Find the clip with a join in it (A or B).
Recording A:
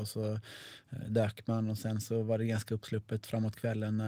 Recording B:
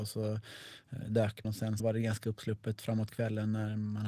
B